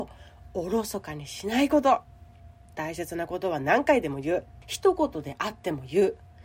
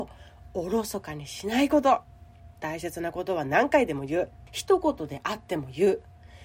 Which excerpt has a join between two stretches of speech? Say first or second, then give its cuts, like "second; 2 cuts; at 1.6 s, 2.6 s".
second; 1 cut; at 2.6 s